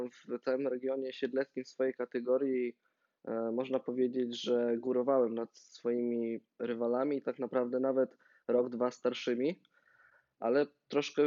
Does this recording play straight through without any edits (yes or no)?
yes